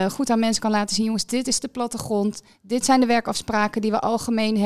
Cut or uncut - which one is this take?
uncut